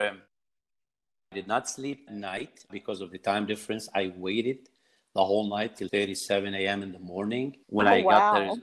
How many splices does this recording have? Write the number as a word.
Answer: four